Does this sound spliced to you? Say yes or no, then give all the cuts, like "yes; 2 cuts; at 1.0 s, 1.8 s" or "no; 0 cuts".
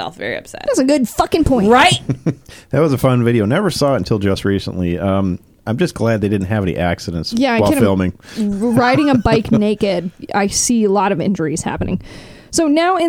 no; 0 cuts